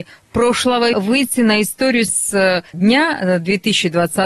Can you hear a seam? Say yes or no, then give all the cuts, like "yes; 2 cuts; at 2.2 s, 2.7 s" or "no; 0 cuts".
yes; 3 cuts; at 0.9 s, 2.1 s, 2.7 s